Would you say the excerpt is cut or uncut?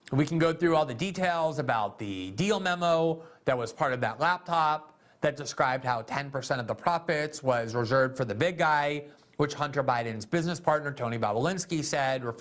uncut